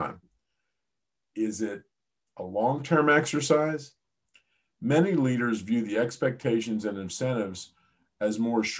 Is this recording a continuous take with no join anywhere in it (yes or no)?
yes